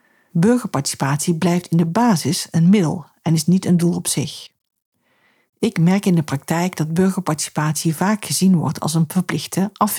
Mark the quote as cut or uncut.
uncut